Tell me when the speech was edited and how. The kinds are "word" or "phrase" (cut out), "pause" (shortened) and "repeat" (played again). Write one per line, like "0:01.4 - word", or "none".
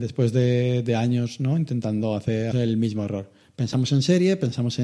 0:02.5 - phrase